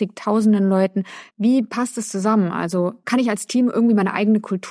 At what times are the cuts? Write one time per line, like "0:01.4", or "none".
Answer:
0:01.3